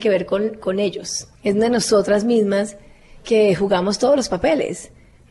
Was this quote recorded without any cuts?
no; 1 cut; at 1.4 s

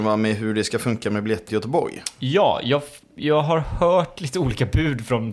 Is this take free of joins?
no; 1 cut; at 1.5 s

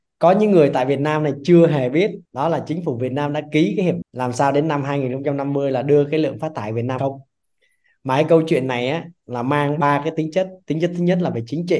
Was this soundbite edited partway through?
yes; 3 cuts; at 2.3 s, 4.0 s, 7.0 s

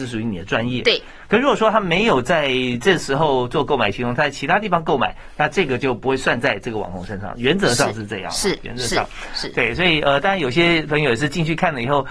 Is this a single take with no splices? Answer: yes; 0 cuts

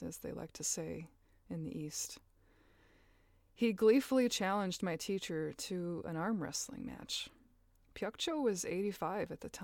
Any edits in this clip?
no; 0 cuts

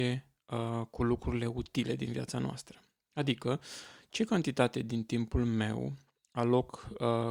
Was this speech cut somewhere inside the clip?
no; 0 cuts

